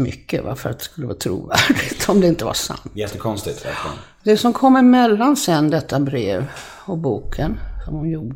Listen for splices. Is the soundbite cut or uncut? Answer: uncut